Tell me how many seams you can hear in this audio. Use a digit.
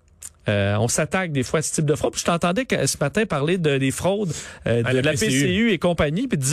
0